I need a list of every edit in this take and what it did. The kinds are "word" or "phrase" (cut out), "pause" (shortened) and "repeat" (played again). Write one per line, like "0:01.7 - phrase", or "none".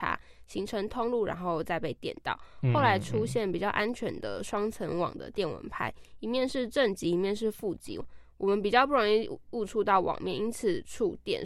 none